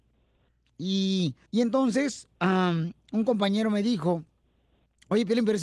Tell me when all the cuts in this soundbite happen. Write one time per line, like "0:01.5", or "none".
0:01.5